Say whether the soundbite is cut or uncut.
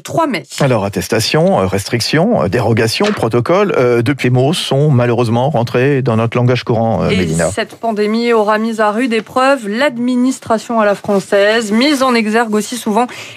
cut